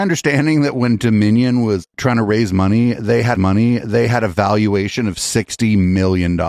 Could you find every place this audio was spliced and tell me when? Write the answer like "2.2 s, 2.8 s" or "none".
1.8 s, 3.3 s